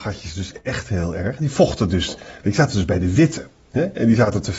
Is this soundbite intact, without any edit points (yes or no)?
yes